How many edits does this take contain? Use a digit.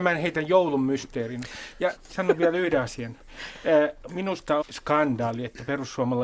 2